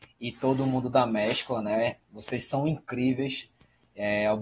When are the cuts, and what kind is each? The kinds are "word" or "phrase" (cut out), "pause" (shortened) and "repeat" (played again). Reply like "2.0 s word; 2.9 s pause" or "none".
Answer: 2.0 s pause